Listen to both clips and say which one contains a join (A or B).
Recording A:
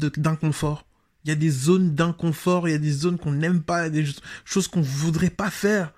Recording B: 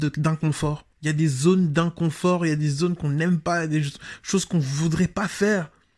B